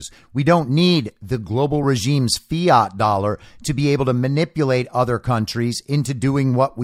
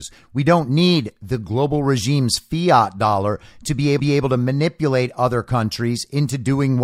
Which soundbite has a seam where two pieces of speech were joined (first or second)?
second